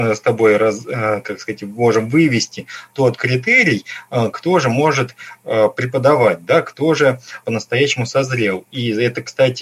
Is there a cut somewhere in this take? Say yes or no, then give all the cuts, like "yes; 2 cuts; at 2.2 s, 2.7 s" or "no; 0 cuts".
yes; 1 cut; at 7.4 s